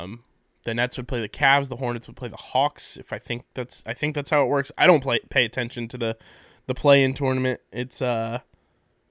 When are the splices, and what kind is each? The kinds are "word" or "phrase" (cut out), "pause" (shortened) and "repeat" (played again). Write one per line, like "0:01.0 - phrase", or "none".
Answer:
none

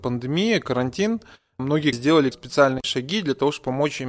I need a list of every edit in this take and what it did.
0:01.6 - word
0:01.9 - word
0:02.3 - word

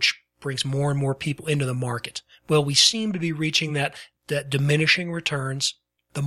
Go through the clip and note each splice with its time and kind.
none

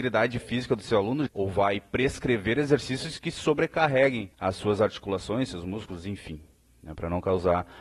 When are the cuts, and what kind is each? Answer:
0:01.3 - phrase
0:04.3 - pause

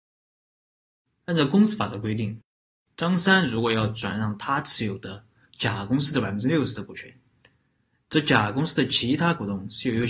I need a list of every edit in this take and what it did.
none

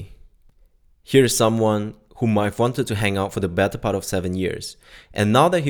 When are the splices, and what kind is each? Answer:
none

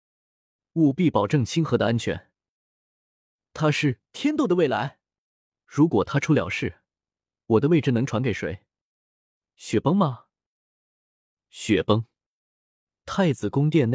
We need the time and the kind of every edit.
0:05.5 - pause

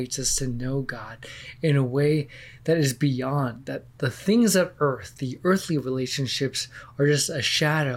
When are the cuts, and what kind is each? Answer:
0:03.9 - pause

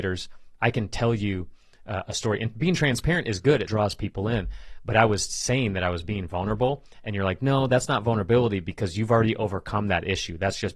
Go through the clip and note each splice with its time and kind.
0:03.7 - word

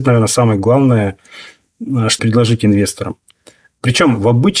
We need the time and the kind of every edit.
0:02.2 - word

